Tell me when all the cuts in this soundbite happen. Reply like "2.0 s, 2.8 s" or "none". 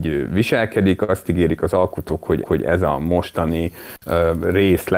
2.4 s